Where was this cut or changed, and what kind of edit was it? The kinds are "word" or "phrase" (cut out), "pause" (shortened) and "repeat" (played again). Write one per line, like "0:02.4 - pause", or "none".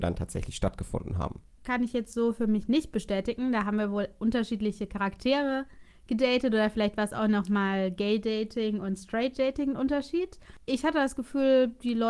none